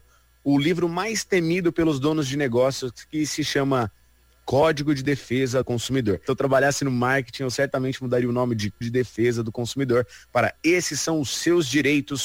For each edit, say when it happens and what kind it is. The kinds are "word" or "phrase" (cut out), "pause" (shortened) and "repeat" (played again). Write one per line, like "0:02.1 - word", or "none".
0:05.6 - word
0:08.8 - word